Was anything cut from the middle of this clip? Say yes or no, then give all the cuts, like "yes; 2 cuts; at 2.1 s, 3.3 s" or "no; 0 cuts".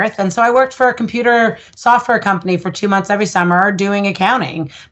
no; 0 cuts